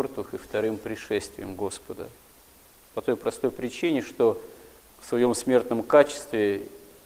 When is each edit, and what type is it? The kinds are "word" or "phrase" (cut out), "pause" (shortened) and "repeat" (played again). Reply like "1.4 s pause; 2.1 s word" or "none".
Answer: none

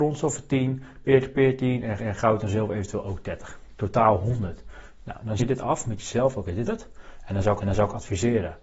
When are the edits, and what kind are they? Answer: 2.0 s repeat; 5.4 s word; 6.7 s word; 7.6 s repeat

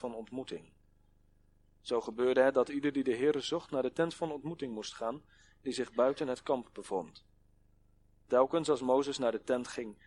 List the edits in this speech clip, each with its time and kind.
none

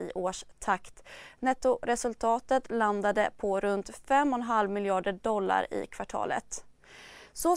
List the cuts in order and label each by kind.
none

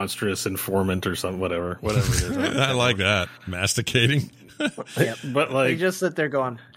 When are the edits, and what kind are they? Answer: none

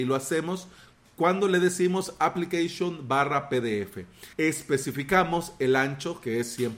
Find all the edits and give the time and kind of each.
4.3 s pause

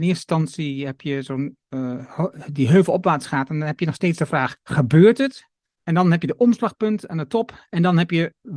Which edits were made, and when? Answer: 4.6 s pause; 5.6 s pause

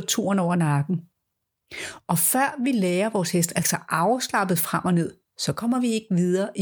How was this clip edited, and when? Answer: 3.6 s word

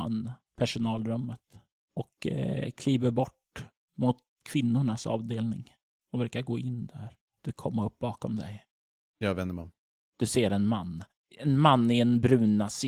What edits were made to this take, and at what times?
7.5 s phrase

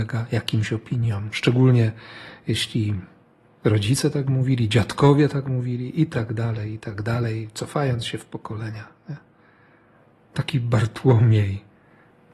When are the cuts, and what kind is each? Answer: none

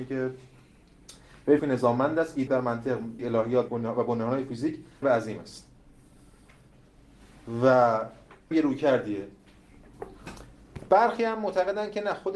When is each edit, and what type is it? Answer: 1.6 s word; 2.5 s word; 3.2 s word; 3.7 s word; 5.0 s phrase; 8.5 s word

